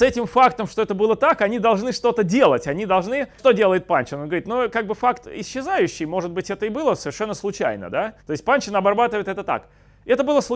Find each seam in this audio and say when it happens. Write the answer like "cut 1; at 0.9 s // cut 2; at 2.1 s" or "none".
cut 1; at 3.4 s // cut 2; at 8.2 s